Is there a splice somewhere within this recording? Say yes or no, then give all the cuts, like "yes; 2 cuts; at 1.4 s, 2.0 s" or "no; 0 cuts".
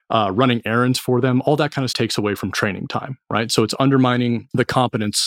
yes; 1 cut; at 1.9 s